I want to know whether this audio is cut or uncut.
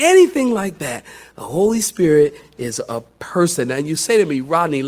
uncut